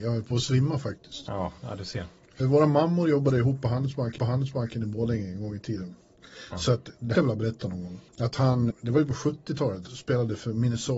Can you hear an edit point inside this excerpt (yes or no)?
yes